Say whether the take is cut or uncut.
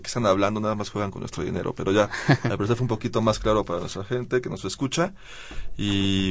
uncut